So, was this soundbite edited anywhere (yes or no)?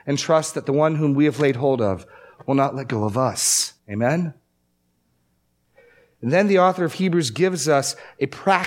yes